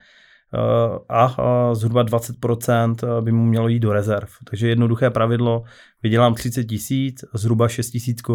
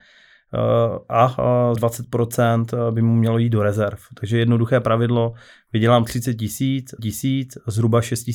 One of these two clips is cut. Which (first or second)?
second